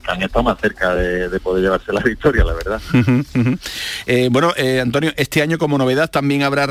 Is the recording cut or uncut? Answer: uncut